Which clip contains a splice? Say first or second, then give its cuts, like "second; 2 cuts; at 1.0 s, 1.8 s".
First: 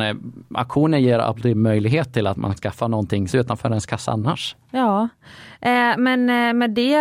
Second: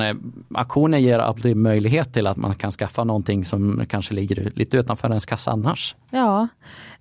first; 2 cuts; at 2.6 s, 3.3 s